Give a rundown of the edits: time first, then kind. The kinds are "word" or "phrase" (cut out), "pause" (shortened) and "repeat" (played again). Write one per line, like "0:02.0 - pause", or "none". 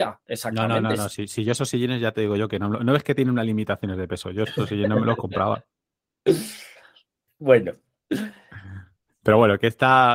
none

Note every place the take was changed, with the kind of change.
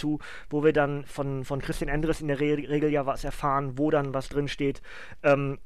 0:01.0 - word

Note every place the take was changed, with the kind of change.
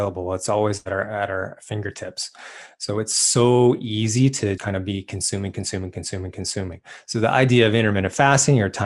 0:04.6 - word

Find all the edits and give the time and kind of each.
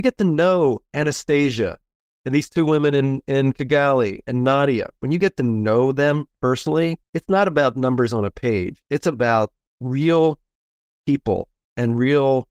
0:07.0 - pause

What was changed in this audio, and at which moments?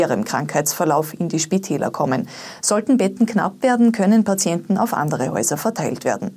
none

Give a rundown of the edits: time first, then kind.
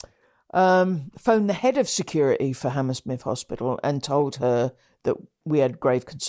none

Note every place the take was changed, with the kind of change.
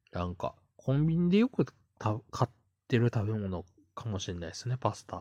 none

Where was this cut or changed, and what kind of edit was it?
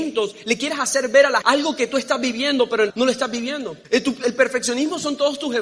0:01.4 - word
0:02.9 - word
0:03.8 - pause

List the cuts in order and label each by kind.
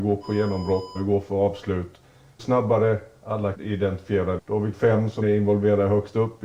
0:00.9 - word
0:02.4 - word
0:03.5 - word
0:04.4 - word
0:04.7 - word
0:05.2 - word

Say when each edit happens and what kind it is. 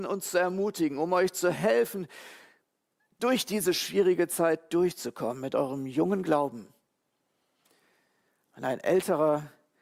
none

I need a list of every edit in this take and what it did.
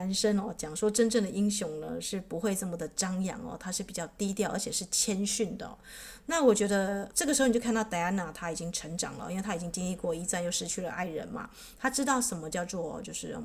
0:07.1 - word

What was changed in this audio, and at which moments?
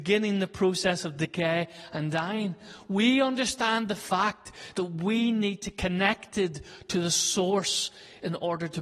0:05.7 - word

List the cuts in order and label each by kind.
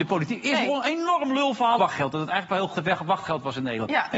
0:01.8 - word
0:02.7 - phrase

